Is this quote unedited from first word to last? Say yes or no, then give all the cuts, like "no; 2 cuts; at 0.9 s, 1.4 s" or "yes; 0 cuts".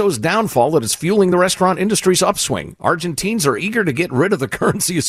yes; 0 cuts